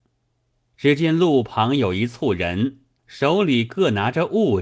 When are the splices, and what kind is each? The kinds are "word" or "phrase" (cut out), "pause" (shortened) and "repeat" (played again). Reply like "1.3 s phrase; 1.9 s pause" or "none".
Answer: 3.0 s phrase